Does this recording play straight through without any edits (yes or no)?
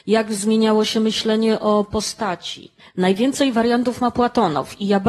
no